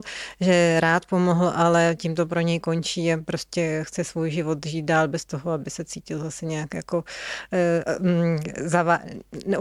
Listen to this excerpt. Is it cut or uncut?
uncut